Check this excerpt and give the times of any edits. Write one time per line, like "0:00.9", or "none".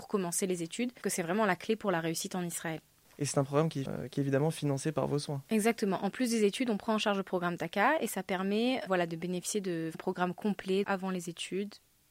0:01.0
0:03.9
0:08.9
0:09.9
0:10.8